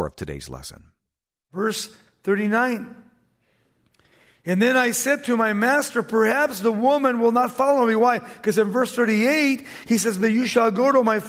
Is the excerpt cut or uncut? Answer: uncut